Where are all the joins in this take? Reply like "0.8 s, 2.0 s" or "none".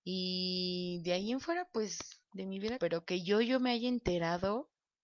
2.2 s, 2.8 s